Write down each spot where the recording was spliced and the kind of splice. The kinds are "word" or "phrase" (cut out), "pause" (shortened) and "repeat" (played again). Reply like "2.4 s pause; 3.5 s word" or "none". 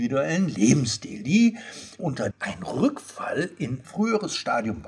2.0 s word; 2.3 s word; 3.8 s word